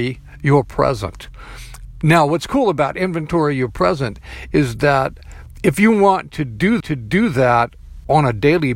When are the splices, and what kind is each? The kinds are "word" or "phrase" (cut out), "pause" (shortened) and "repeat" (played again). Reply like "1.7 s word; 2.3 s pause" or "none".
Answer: 6.8 s repeat